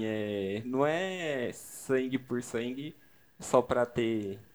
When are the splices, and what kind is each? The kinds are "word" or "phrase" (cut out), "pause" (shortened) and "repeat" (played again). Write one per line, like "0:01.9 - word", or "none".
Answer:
none